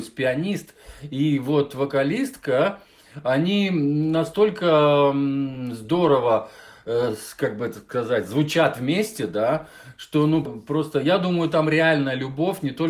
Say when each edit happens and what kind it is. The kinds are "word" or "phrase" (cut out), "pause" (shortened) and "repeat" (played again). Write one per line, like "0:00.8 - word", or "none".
0:10.5 - word